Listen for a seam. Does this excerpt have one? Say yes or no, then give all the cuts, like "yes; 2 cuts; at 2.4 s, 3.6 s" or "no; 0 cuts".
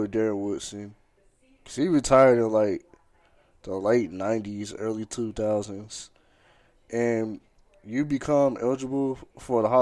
no; 0 cuts